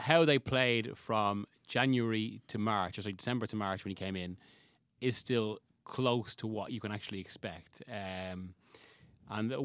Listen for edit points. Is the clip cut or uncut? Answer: uncut